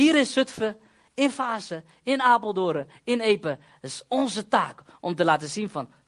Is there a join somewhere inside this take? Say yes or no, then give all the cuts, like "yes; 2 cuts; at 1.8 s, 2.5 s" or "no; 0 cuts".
no; 0 cuts